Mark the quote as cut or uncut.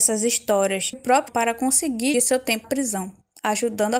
cut